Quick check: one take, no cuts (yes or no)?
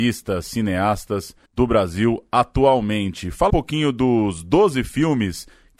no